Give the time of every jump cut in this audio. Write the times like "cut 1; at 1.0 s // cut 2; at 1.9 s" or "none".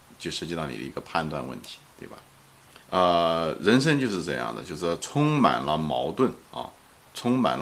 cut 1; at 2.8 s